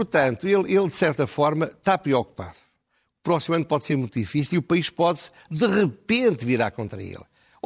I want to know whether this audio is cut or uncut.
uncut